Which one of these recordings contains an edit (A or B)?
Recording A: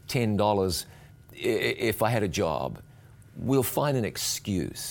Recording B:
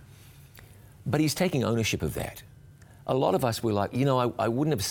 B